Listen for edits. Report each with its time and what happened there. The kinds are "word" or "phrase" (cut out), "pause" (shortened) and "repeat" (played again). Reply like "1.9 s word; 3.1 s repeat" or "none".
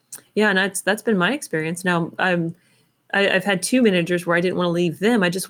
none